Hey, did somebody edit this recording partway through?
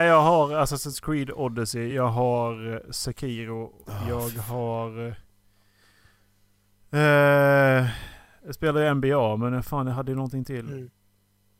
no; 0 cuts

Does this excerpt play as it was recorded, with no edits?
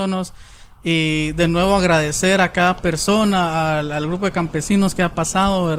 yes; 0 cuts

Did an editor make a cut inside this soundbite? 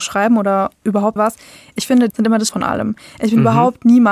yes; 3 cuts; at 1.2 s, 2.1 s, 2.5 s

